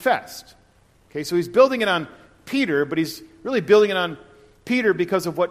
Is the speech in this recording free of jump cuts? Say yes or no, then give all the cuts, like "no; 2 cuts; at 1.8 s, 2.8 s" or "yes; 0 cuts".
yes; 0 cuts